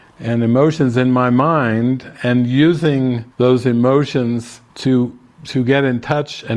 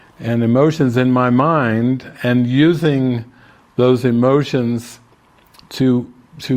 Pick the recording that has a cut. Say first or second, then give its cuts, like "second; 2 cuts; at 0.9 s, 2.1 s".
first; 2 cuts; at 3.3 s, 4.7 s